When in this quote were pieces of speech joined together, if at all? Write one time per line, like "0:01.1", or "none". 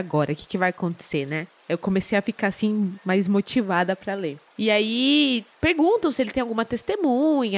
0:05.5